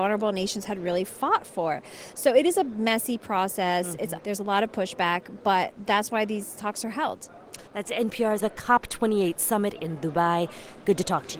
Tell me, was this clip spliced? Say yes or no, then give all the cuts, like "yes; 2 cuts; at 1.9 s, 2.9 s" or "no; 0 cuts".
yes; 3 cuts; at 4.2 s, 7.7 s, 8.4 s